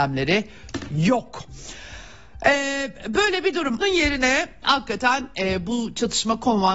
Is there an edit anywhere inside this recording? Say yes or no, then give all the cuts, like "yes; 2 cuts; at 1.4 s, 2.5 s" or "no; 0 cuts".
yes; 1 cut; at 3.8 s